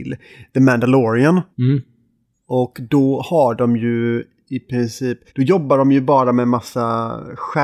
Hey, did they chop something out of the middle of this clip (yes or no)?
yes